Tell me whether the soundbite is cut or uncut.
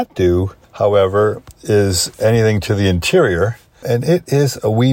uncut